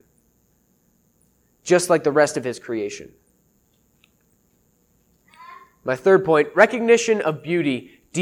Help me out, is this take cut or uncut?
uncut